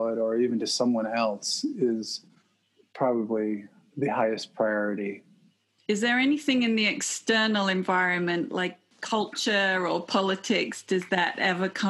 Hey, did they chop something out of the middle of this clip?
no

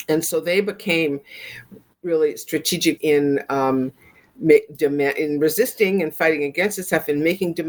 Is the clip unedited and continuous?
no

